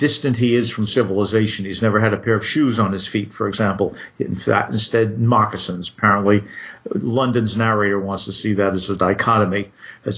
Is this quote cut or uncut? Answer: uncut